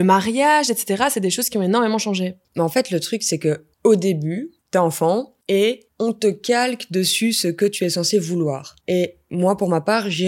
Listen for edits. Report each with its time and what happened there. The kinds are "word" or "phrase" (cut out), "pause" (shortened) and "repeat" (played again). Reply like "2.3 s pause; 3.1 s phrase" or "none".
2.4 s pause; 3.7 s pause; 4.6 s pause; 5.4 s pause; 8.8 s pause